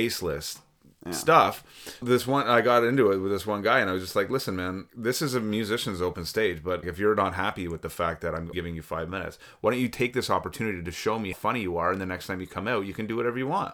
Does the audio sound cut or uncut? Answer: cut